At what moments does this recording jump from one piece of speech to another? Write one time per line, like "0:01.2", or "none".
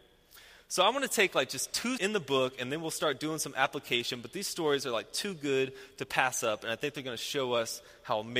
0:02.0